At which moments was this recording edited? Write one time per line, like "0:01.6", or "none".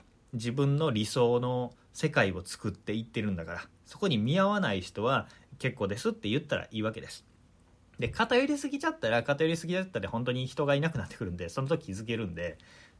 none